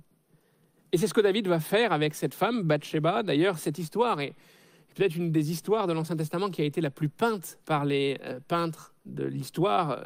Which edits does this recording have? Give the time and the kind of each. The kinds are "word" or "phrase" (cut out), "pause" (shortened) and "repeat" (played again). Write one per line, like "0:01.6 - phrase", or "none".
0:07.6 - pause
0:09.0 - pause